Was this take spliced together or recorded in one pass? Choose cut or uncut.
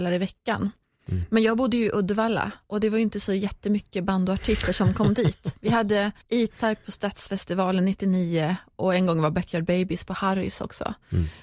cut